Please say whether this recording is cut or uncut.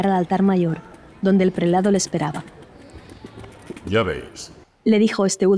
uncut